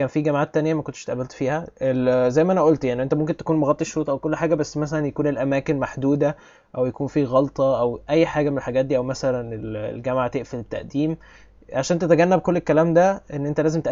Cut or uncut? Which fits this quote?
uncut